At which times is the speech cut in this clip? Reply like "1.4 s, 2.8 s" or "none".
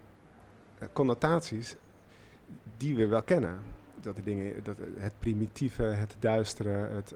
none